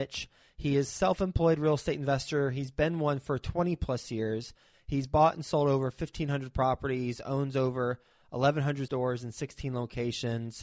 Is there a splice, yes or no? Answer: yes